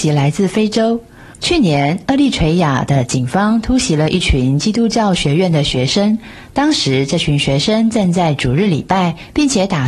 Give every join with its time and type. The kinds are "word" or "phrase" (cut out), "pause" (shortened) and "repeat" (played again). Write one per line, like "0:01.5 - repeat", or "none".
0:01.3 - pause